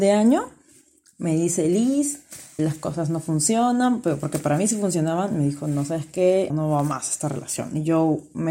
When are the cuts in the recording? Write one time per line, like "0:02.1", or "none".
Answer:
0:02.6
0:06.5